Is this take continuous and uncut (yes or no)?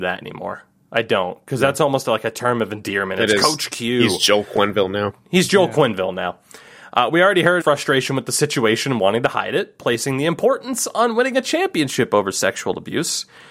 no